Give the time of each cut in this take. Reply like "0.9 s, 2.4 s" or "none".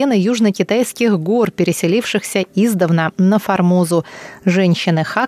none